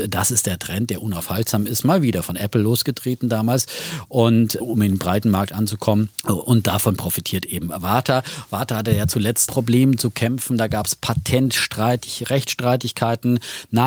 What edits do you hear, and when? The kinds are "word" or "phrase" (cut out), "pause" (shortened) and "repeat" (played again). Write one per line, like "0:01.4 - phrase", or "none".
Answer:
0:04.6 - word
0:06.1 - pause
0:09.5 - phrase